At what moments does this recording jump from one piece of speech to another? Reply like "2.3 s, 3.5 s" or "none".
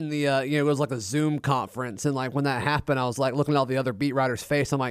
none